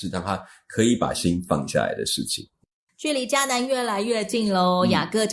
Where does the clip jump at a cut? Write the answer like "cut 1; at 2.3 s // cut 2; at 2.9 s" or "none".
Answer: none